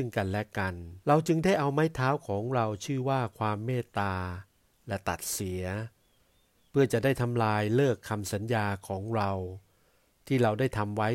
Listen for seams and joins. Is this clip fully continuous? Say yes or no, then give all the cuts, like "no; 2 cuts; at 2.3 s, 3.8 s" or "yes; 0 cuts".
no; 1 cut; at 1.0 s